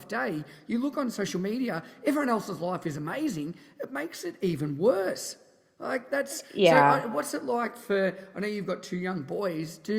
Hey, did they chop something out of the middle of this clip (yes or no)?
no